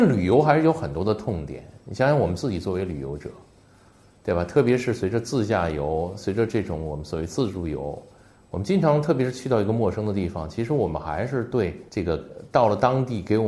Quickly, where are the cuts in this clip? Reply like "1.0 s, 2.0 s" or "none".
11.9 s